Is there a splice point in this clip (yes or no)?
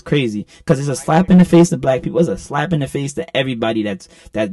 no